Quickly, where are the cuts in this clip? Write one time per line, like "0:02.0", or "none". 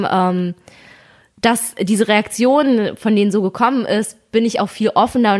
none